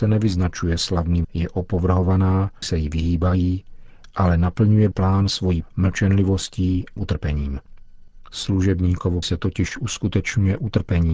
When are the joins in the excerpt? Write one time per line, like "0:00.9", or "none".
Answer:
0:01.2
0:02.6
0:04.9
0:05.6
0:07.0
0:09.2